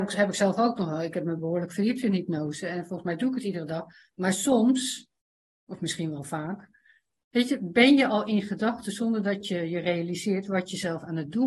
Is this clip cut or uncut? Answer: uncut